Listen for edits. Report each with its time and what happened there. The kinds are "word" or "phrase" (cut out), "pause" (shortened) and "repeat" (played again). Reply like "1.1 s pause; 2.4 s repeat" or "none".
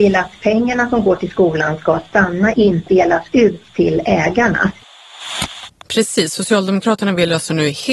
2.5 s phrase; 2.9 s word